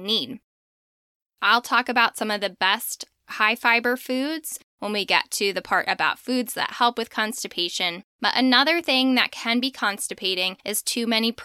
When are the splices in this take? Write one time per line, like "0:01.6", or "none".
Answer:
0:08.1

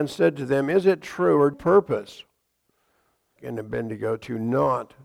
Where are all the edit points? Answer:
0:01.5
0:03.4

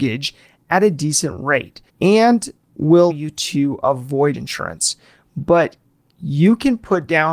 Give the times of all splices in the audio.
0:01.9
0:03.1
0:04.3

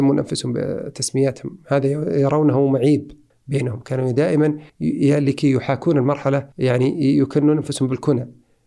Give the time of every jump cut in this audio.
0:03.3
0:04.7
0:06.5

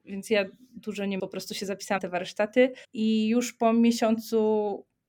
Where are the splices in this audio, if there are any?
0:01.2
0:02.0
0:02.8

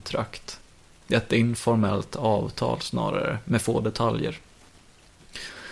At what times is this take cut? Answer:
none

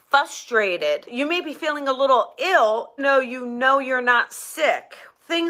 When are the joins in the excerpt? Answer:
0:03.0

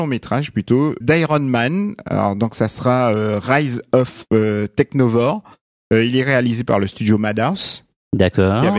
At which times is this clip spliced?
0:01.0

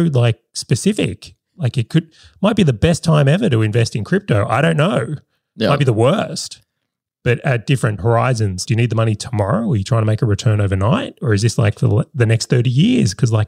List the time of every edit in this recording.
0:08.0
0:08.6

